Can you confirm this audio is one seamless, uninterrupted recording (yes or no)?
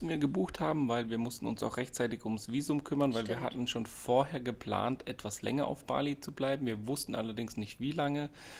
yes